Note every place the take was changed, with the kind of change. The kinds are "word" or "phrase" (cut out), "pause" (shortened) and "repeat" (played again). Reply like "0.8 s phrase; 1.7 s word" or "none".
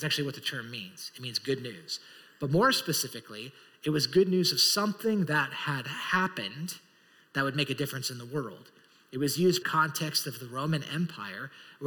9.6 s phrase